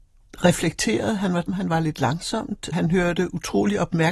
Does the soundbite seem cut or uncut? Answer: cut